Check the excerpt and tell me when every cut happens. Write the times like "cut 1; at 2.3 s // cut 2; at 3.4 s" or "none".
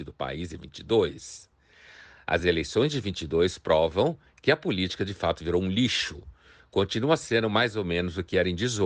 none